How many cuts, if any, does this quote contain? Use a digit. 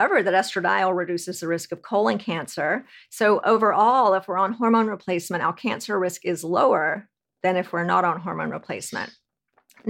0